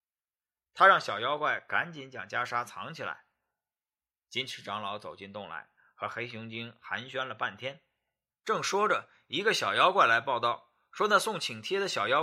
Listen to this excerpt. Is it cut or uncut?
uncut